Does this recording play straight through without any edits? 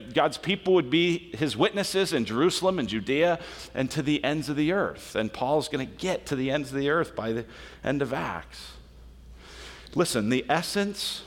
no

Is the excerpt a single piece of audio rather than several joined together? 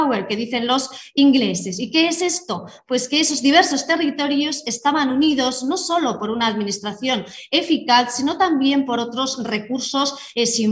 yes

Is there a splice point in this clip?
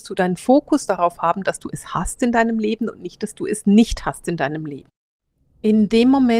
no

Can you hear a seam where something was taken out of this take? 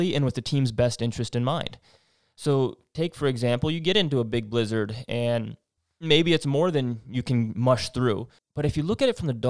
no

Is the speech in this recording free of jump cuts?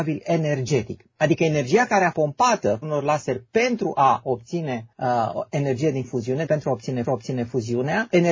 no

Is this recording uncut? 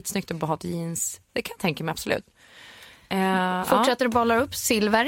yes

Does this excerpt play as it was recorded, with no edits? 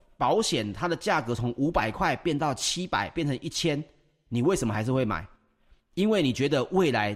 yes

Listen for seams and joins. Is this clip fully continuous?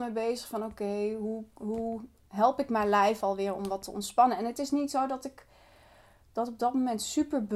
yes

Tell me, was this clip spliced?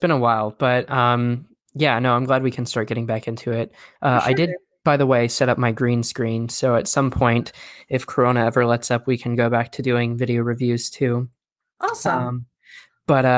no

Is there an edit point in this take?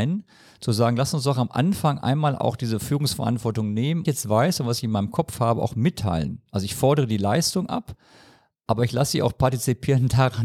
yes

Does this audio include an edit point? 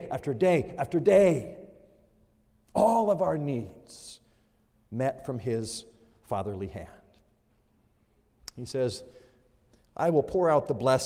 no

